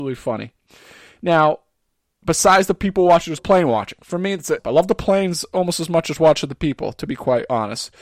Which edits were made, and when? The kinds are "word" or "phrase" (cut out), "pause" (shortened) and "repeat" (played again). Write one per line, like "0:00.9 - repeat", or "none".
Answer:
0:03.4 - word
0:04.6 - phrase